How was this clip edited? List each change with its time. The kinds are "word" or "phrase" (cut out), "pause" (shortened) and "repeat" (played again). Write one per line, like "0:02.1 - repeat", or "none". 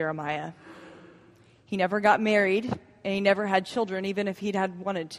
none